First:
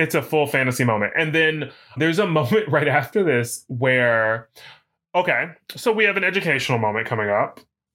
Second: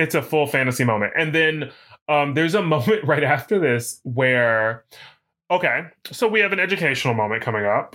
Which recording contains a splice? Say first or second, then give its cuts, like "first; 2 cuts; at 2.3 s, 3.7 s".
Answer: first; 1 cut; at 2.0 s